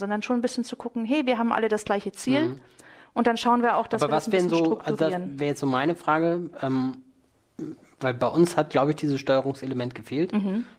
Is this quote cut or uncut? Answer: uncut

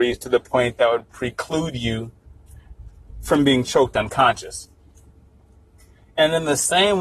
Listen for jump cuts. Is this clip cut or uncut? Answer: uncut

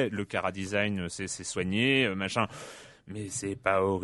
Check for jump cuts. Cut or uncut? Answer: uncut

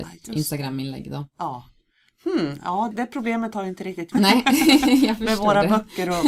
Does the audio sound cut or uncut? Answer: cut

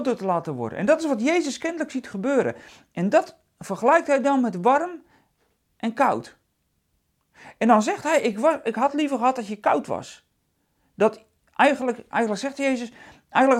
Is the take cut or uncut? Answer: uncut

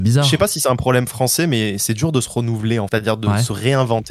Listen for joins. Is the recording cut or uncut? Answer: cut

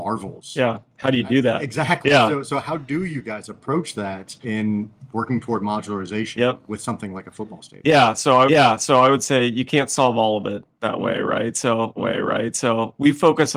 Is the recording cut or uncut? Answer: cut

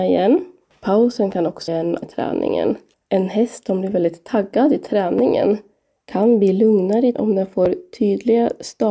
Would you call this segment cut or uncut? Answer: cut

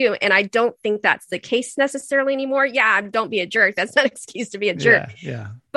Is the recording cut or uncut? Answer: uncut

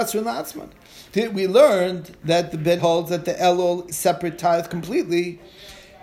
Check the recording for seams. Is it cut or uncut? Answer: cut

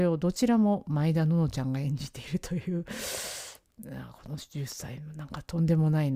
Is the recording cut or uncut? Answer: uncut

